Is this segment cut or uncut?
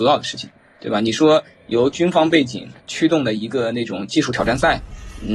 cut